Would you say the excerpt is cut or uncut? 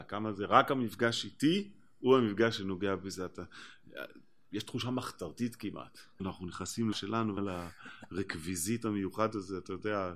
cut